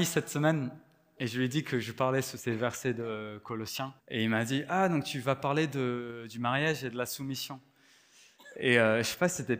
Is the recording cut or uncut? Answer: cut